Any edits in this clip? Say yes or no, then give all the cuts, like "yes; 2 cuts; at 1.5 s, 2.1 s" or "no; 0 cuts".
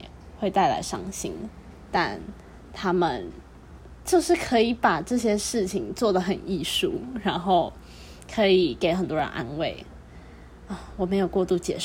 no; 0 cuts